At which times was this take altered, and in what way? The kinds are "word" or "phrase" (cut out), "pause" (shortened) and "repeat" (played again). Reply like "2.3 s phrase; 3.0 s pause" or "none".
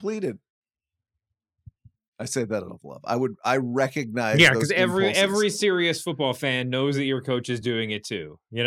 none

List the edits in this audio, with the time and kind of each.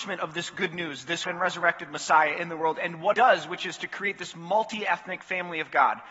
1.3 s word; 3.1 s word

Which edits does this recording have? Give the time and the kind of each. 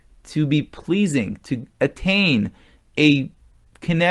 1.7 s pause

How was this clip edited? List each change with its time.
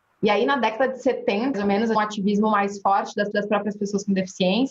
1.5 s word; 1.9 s phrase; 3.3 s repeat

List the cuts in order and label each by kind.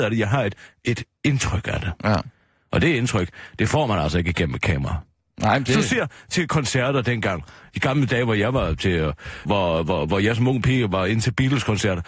9.4 s word

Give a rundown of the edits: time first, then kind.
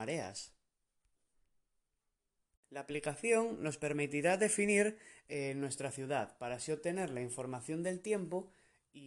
none

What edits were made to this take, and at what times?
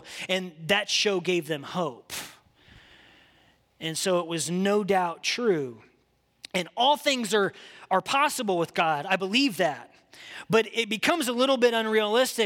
none

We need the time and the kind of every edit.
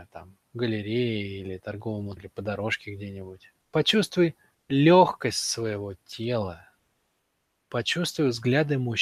2.2 s word; 3.6 s pause

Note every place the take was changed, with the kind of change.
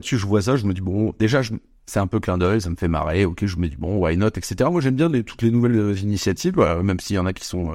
none

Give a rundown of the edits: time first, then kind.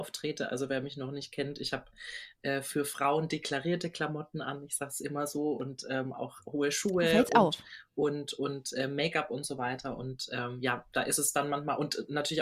none

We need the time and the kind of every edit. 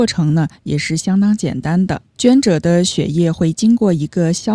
2.1 s pause

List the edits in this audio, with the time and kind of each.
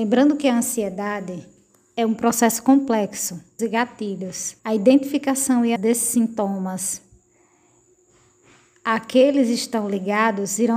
3.6 s phrase; 4.6 s pause; 5.8 s word

